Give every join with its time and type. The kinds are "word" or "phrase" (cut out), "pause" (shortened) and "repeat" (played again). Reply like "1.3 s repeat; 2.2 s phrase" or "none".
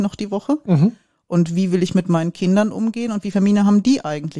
3.3 s word